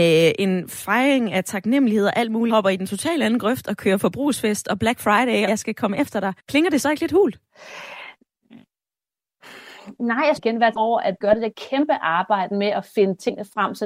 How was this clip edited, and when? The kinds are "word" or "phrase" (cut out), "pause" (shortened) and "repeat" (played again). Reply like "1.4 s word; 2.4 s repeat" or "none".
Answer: 2.5 s word; 5.5 s word; 6.4 s pause; 10.4 s phrase; 10.7 s word; 11.2 s word